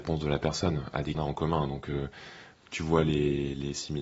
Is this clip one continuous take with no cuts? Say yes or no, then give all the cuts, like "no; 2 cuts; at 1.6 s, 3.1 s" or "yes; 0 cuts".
no; 1 cut; at 1.1 s